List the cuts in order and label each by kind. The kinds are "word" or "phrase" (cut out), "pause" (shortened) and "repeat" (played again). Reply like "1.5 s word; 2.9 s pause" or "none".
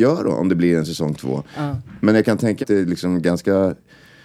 2.6 s word